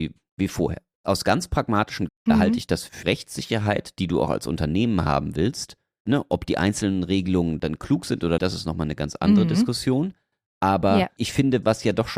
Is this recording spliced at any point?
yes; 3 cuts; at 2.1 s, 3.0 s, 8.4 s

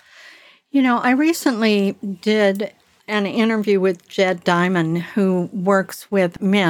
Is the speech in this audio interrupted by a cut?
no; 0 cuts

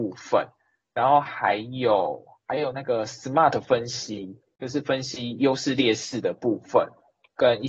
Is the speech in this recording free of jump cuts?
yes; 0 cuts

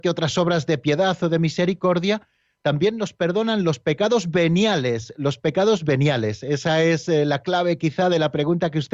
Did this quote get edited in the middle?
no; 0 cuts

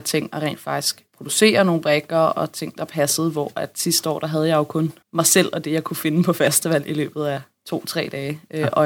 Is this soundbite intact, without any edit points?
no; 2 cuts; at 1.1 s, 5.0 s

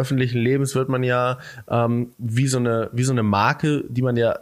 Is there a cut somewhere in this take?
yes; 1 cut; at 2.1 s

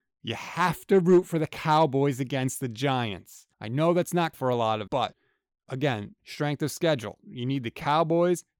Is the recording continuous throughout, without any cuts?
no; 3 cuts; at 3.5 s, 4.3 s, 4.9 s

